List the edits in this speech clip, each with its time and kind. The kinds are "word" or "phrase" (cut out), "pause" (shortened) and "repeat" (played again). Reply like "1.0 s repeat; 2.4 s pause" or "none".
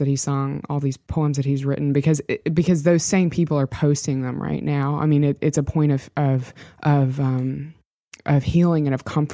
none